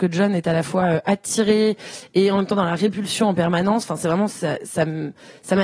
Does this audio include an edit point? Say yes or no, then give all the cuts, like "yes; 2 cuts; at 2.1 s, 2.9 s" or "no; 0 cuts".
no; 0 cuts